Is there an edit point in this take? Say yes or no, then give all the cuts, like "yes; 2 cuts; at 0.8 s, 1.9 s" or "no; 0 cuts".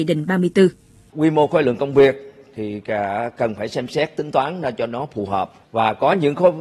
no; 0 cuts